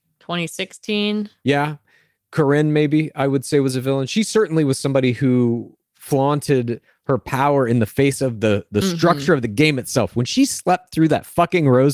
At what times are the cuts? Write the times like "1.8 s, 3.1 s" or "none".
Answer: none